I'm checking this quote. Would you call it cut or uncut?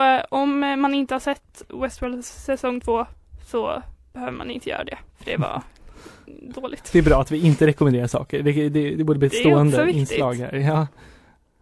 cut